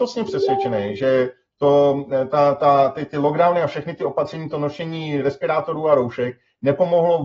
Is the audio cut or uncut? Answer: uncut